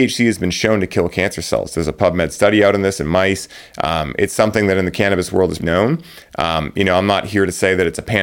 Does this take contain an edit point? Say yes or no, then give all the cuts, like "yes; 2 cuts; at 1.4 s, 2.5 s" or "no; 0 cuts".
yes; 1 cut; at 5.6 s